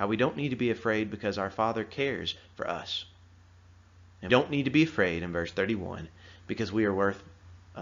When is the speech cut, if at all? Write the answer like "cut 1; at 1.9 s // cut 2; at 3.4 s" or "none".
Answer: cut 1; at 4.3 s